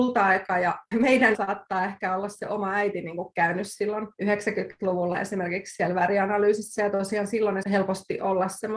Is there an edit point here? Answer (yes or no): yes